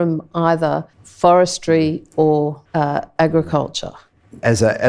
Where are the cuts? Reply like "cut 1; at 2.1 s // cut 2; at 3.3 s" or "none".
cut 1; at 0.9 s // cut 2; at 2.7 s